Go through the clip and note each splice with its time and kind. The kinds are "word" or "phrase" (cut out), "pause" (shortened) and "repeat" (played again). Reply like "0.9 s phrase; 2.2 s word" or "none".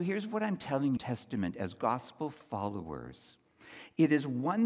1.0 s phrase